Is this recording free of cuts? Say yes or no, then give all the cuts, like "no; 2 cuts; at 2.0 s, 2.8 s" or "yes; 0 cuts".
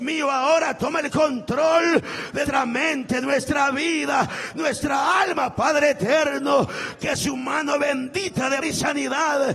no; 2 cuts; at 2.5 s, 8.6 s